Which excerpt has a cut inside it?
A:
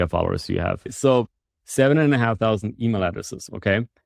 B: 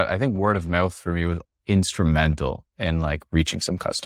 B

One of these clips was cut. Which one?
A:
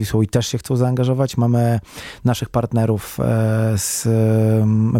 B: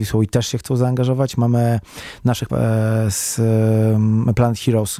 B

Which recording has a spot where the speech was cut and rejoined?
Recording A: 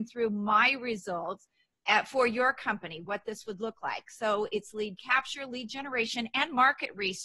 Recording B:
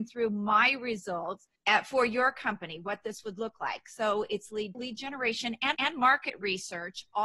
B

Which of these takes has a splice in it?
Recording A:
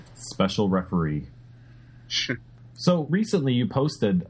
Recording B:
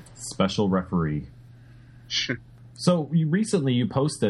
A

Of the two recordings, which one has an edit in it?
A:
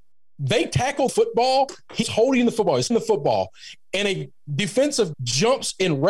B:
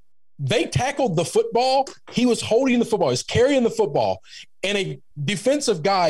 A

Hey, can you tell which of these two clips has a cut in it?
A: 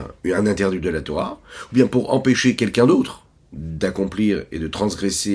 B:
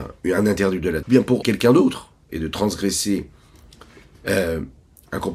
B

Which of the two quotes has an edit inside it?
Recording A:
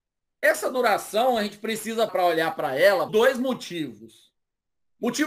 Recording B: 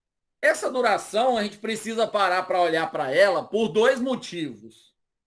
A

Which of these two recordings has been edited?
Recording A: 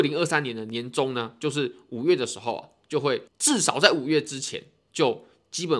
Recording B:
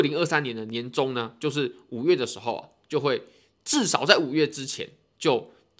A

